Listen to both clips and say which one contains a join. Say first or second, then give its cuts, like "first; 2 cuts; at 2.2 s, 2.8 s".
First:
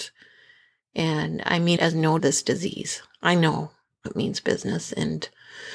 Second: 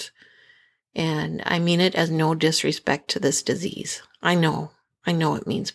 first; 3 cuts; at 1.8 s, 2.2 s, 4.1 s